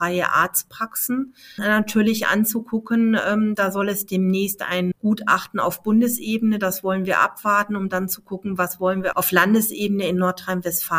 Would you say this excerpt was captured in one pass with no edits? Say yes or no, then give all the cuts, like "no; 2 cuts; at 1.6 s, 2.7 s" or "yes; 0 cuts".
no; 3 cuts; at 1.6 s, 4.9 s, 9.1 s